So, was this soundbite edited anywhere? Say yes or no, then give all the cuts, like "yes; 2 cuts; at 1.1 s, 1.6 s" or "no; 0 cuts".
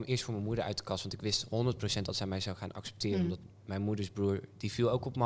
no; 0 cuts